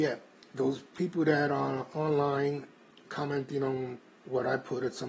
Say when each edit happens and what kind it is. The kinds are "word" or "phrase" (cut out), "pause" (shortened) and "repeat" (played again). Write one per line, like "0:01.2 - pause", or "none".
0:03.1 - word